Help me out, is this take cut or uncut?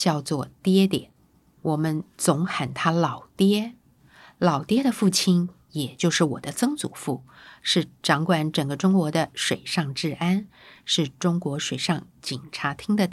uncut